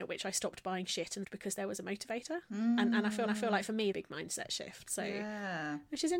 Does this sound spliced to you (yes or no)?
yes